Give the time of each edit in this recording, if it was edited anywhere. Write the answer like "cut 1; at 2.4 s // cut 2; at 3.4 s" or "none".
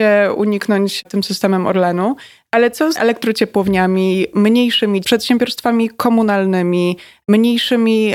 cut 1; at 1.0 s // cut 2; at 2.9 s // cut 3; at 5.0 s